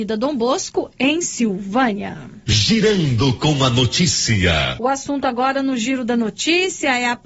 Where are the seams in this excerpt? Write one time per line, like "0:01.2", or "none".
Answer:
none